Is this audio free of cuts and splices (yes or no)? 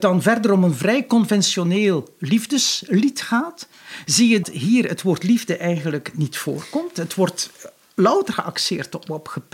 no